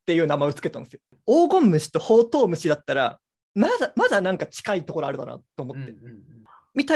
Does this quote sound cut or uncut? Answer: uncut